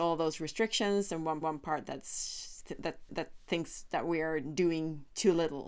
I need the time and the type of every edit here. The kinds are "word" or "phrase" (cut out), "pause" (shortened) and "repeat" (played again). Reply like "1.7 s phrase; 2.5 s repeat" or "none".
1.4 s repeat; 3.1 s repeat